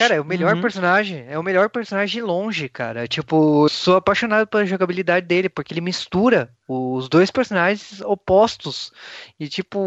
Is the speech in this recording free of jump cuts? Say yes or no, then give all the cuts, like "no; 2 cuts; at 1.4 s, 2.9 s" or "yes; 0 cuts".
no; 1 cut; at 3.7 s